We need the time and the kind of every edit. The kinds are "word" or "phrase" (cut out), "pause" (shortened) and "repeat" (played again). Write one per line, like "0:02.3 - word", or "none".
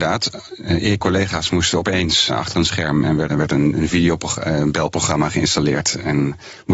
0:01.0 - phrase
0:02.3 - word
0:03.3 - word